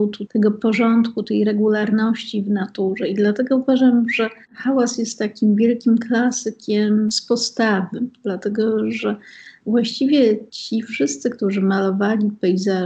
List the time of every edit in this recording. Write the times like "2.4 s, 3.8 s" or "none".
4.4 s, 10.5 s